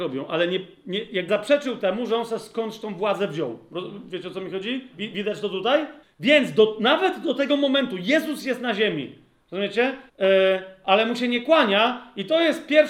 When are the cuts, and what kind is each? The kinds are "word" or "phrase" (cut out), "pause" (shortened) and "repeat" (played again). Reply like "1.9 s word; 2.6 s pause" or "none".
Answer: 1.3 s word; 6.0 s pause; 10.1 s pause